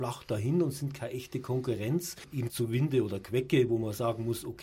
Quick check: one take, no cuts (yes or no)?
no